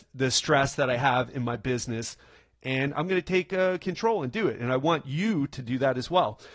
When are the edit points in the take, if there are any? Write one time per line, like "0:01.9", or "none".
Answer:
none